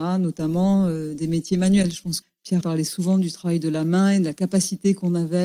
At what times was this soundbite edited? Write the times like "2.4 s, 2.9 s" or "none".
2.2 s, 2.6 s

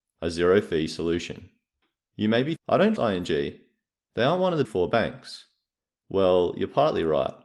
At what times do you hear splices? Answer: 2.6 s, 3.0 s, 4.6 s

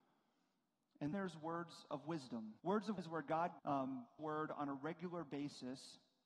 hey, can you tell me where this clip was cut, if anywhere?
1.1 s, 2.6 s, 3.0 s, 3.6 s, 4.2 s

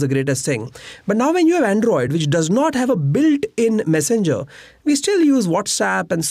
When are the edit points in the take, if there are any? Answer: none

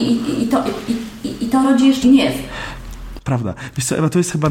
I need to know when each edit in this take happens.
2.0 s

